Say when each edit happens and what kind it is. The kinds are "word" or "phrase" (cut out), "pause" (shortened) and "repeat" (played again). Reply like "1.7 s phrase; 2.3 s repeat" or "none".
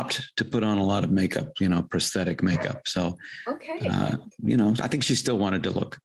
4.3 s word